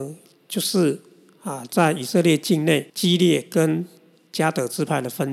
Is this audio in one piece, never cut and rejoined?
no; 1 cut; at 2.9 s

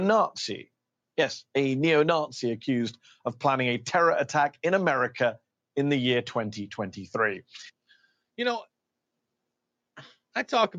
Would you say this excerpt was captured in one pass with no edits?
yes; 0 cuts

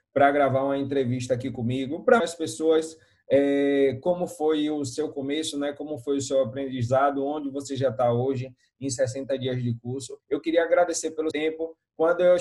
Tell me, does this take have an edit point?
yes; 3 cuts; at 2.2 s, 10.2 s, 11.3 s

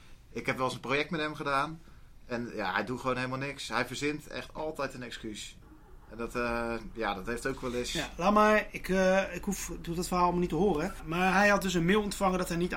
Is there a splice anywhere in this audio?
no; 0 cuts

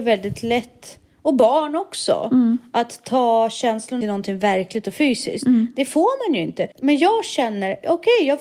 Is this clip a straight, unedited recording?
no; 2 cuts; at 4.0 s, 6.7 s

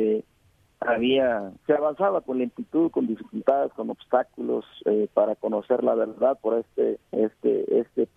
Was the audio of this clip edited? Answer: yes; 2 cuts; at 1.6 s, 7.0 s

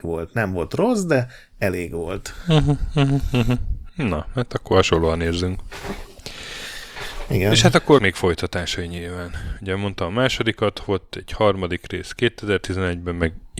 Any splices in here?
yes; 1 cut; at 8.0 s

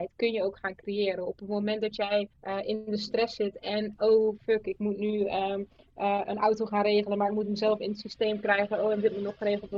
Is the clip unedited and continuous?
no; 1 cut; at 2.3 s

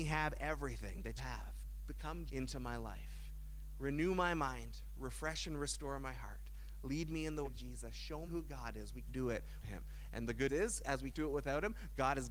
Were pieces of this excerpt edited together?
yes; 8 cuts; at 1.2 s, 2.3 s, 7.4 s, 8.3 s, 9.1 s, 9.6 s, 10.5 s, 11.1 s

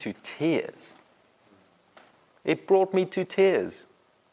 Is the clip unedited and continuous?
yes; 0 cuts

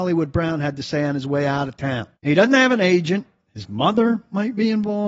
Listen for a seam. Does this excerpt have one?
yes; 1 cut; at 2.1 s

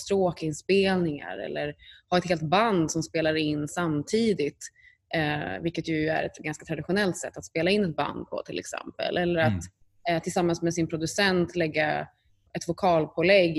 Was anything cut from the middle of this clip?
yes; 1 cut; at 12.5 s

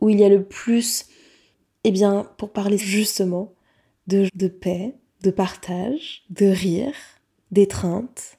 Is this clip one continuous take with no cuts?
no; 2 cuts; at 2.8 s, 4.3 s

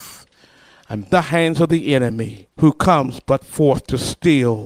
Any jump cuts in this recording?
yes; 2 cuts; at 1.1 s, 2.5 s

